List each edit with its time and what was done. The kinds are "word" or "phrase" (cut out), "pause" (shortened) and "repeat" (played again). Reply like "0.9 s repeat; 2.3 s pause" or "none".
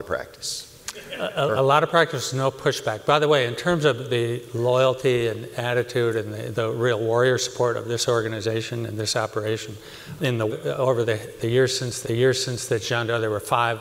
1.6 s word; 6.5 s word; 10.2 s word; 10.5 s phrase; 12.0 s repeat